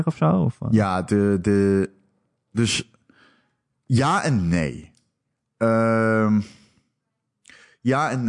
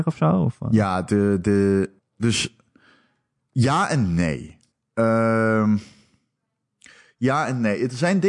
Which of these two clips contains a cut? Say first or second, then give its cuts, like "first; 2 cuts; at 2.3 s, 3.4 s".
second; 2 cuts; at 2.0 s, 4.7 s